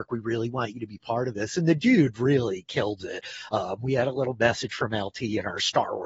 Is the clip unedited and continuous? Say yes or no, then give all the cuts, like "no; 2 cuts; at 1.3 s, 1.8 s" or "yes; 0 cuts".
yes; 0 cuts